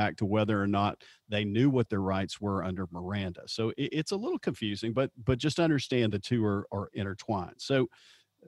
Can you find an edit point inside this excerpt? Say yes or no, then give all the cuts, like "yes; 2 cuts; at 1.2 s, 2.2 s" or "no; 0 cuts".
no; 0 cuts